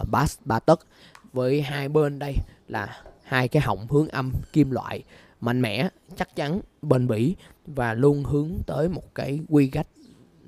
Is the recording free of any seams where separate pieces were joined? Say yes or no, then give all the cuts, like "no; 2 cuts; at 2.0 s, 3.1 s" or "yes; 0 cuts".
yes; 0 cuts